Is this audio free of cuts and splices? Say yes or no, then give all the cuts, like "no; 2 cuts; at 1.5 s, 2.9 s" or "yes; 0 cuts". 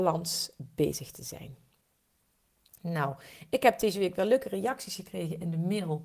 yes; 0 cuts